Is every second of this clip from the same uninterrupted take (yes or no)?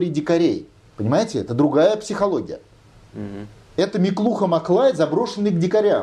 yes